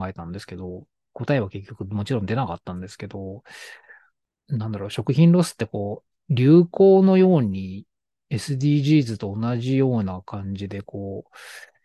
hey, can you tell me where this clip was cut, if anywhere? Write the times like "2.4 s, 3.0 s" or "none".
none